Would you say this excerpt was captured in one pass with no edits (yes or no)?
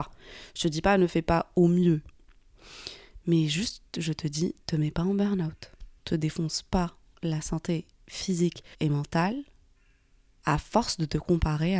no